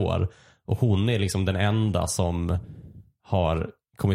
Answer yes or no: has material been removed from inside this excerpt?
no